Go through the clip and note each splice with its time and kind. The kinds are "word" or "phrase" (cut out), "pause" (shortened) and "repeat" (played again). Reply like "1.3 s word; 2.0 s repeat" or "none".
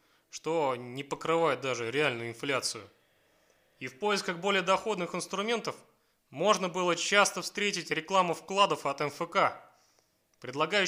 none